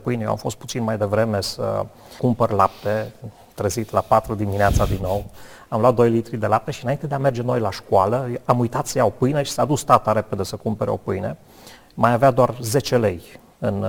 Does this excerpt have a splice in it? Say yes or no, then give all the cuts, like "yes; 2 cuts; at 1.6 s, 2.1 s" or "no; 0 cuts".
no; 0 cuts